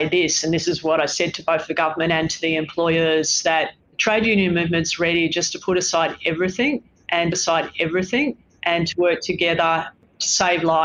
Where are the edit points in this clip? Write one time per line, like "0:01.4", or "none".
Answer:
0:03.8
0:07.3